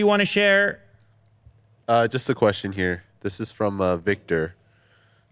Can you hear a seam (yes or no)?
no